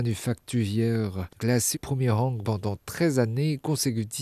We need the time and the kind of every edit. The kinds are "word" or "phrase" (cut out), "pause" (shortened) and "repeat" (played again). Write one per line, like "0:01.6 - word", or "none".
0:01.4 - word
0:01.7 - word
0:02.4 - word